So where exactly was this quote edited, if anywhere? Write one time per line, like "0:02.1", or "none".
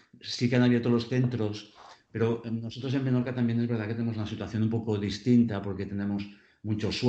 none